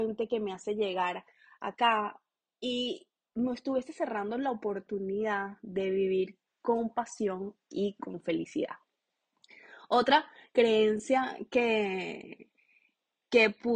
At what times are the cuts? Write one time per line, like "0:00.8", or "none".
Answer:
none